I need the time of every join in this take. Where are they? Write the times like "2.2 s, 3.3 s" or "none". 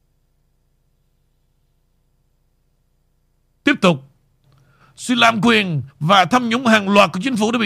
5.9 s